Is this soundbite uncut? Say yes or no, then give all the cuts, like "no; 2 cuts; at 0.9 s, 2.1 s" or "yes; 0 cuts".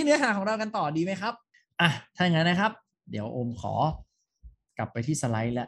yes; 0 cuts